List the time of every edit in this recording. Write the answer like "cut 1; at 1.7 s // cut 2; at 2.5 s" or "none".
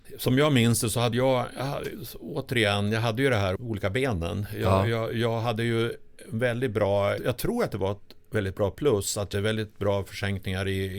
cut 1; at 1.1 s // cut 2; at 3.6 s // cut 3; at 7.2 s // cut 4; at 9.3 s